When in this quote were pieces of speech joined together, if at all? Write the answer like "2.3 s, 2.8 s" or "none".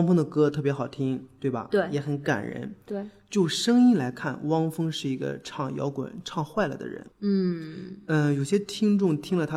7.1 s